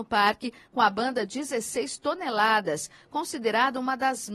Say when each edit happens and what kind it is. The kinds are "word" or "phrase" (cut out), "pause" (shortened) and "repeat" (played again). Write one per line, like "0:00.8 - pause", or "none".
none

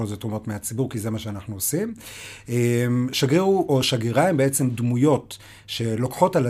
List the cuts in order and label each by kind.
none

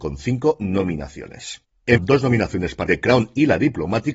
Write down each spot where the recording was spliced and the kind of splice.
0:02.0 - phrase
0:02.9 - word

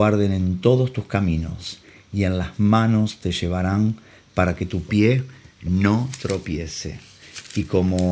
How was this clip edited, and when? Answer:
none

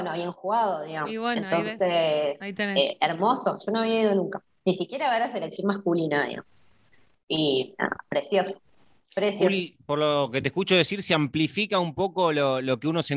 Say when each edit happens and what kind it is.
none

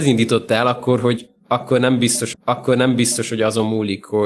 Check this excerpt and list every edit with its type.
0:02.3 - repeat

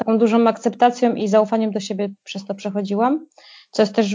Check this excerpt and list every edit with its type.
none

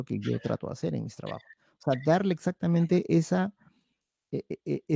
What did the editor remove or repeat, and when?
none

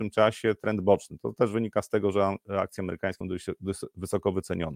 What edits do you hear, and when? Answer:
0:03.2 - word

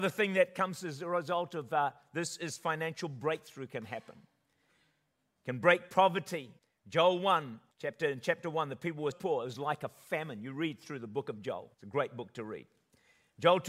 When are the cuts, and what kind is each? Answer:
0:06.6 - pause
0:07.7 - pause
0:09.1 - word
0:11.7 - pause

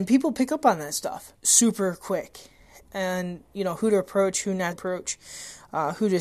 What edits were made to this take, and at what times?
0:01.3 - word
0:04.7 - word

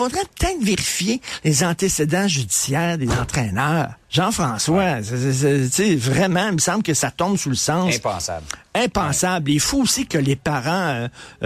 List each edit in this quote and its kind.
0:04.0 - pause

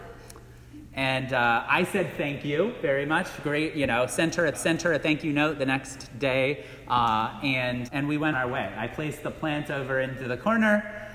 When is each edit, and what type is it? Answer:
0:04.5 - repeat
0:07.9 - word
0:08.3 - word

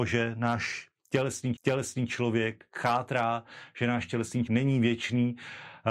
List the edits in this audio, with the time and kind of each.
0:01.6 - repeat
0:04.5 - word

